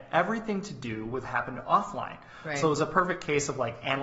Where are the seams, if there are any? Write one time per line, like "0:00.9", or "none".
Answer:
0:01.2